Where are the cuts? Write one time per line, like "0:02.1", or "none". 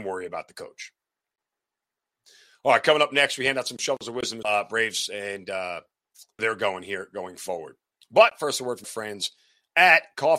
0:04.4
0:06.4
0:08.8